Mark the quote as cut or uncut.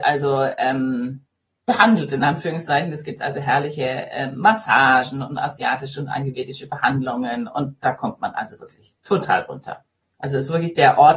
uncut